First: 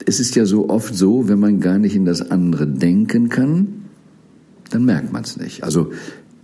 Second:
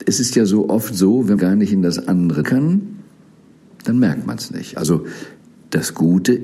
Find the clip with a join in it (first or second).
second